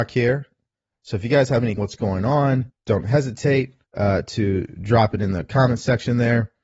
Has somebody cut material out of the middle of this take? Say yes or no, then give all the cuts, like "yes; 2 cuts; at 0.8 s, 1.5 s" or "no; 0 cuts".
yes; 3 cuts; at 1.8 s, 2.7 s, 3.8 s